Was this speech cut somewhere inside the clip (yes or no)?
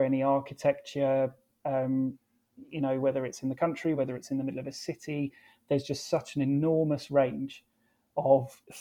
no